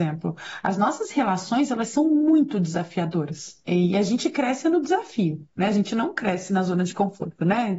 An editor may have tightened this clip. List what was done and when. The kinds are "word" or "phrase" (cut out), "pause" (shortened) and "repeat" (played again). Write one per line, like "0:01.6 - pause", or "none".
none